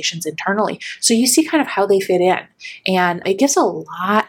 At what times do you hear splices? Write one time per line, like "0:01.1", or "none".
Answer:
0:03.2